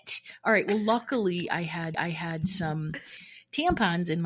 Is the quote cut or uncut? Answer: cut